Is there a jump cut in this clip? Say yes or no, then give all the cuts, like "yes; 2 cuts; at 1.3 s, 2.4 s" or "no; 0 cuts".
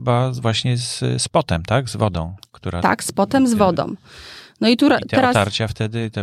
no; 0 cuts